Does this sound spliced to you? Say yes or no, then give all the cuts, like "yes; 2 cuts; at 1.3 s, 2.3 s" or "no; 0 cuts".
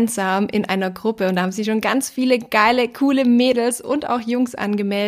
no; 0 cuts